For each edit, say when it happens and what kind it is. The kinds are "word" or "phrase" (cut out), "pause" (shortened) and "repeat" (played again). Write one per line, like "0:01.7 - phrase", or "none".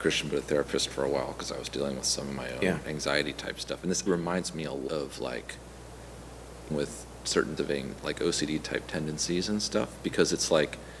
0:04.1 - word
0:04.9 - word
0:06.7 - word
0:07.6 - word